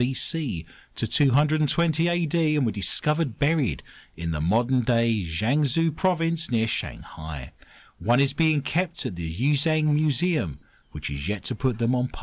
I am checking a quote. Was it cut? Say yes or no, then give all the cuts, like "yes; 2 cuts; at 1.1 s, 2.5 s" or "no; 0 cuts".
no; 0 cuts